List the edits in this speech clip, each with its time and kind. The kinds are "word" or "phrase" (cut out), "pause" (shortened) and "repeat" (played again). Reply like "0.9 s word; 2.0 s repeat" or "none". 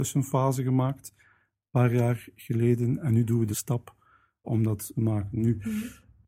3.5 s word; 4.4 s word; 4.9 s phrase